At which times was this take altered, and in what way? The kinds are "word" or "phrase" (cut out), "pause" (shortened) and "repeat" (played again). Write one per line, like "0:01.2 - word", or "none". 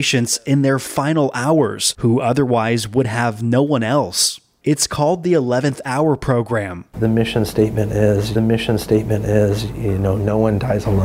0:08.3 - repeat

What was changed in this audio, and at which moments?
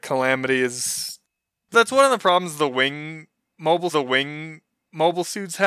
0:01.7 - word
0:03.9 - repeat

